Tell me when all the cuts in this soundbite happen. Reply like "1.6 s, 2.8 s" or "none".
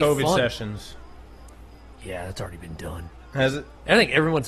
none